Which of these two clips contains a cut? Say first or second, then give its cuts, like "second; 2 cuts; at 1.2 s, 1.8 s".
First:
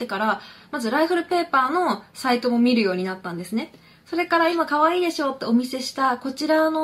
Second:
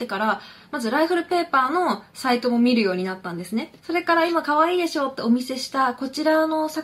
second; 1 cut; at 3.8 s